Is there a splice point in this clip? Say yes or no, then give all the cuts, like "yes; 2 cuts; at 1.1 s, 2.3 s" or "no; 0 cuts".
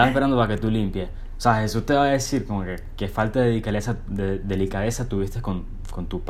no; 0 cuts